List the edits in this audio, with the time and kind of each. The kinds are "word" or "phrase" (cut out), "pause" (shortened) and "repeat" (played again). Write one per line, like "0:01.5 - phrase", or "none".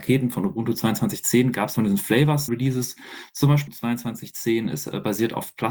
0:01.8 - phrase
0:02.5 - word
0:03.7 - word